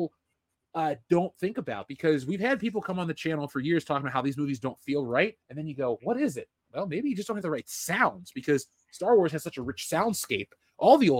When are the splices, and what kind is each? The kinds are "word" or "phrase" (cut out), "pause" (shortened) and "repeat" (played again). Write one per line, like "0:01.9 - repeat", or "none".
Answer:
0:05.4 - pause